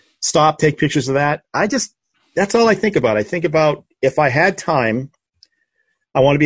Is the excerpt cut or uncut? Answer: uncut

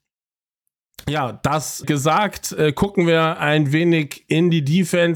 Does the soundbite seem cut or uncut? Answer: cut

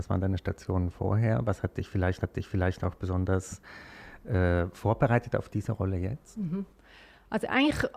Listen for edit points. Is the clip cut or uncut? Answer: cut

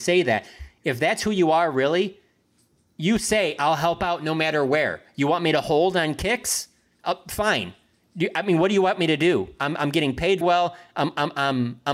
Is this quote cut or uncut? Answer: cut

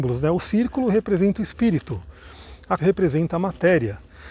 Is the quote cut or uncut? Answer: cut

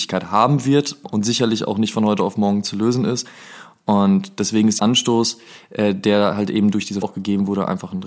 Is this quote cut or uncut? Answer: cut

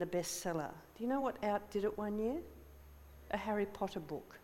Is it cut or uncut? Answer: uncut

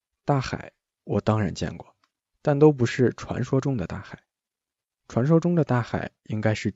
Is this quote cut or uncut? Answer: uncut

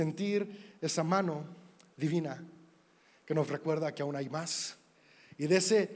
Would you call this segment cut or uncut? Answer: uncut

